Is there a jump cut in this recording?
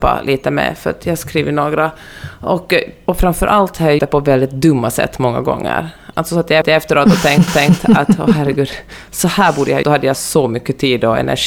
yes; 5 cuts; at 4.0 s, 6.6 s, 7.5 s, 9.8 s, 10.1 s

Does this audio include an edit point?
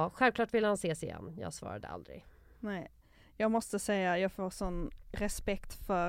no; 0 cuts

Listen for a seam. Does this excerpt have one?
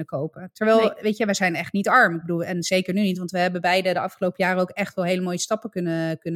no; 0 cuts

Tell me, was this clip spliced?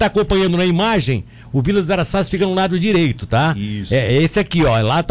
no; 0 cuts

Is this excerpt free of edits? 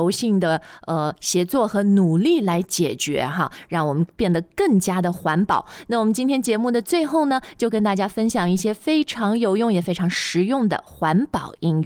yes; 0 cuts

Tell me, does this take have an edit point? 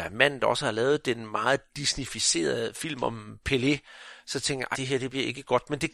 yes; 1 cut; at 4.7 s

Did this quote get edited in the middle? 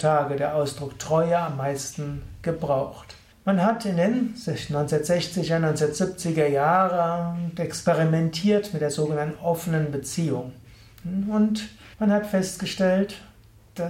yes; 2 cuts; at 3.3 s, 11.9 s

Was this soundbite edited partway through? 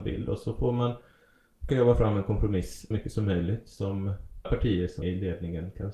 yes; 4 cuts; at 1.7 s, 2.9 s, 4.4 s, 5.0 s

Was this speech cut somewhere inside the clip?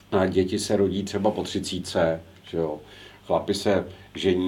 no; 0 cuts

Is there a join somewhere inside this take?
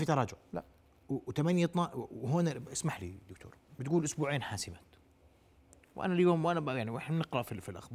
no; 0 cuts

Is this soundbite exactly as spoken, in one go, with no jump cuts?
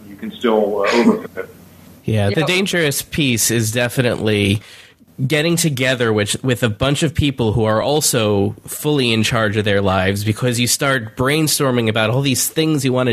yes; 0 cuts

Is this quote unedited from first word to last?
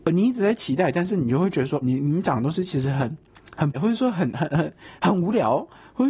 no; 2 cuts; at 1.8 s, 3.7 s

